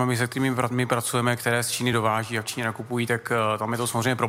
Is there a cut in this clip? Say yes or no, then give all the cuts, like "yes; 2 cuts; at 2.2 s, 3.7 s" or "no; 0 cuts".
no; 0 cuts